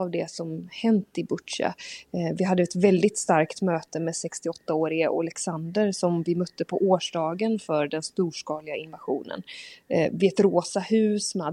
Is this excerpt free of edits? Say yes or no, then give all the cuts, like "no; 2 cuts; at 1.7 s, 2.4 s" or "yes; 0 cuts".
yes; 0 cuts